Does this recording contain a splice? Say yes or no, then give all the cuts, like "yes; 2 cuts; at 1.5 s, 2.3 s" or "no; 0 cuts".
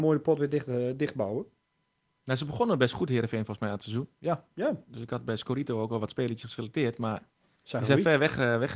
no; 0 cuts